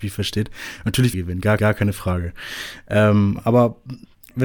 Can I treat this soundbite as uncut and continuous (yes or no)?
no